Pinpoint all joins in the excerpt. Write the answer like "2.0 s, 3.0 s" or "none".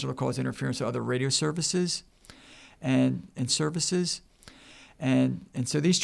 3.5 s